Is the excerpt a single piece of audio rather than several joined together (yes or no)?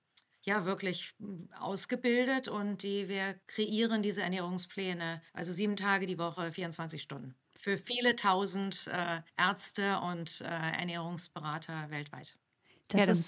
no